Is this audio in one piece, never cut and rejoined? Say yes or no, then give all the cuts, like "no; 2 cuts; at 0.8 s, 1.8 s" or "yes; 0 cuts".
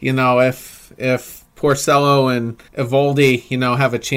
no; 1 cut; at 2.7 s